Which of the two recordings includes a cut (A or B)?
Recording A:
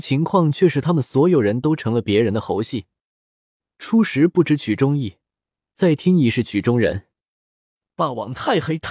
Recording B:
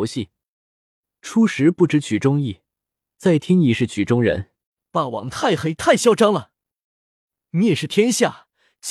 B